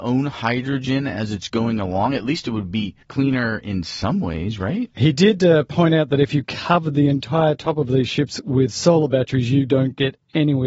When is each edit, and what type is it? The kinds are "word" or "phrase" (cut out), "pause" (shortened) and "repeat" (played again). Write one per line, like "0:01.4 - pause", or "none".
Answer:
0:03.0 - pause